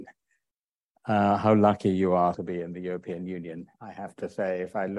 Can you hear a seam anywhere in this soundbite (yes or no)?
yes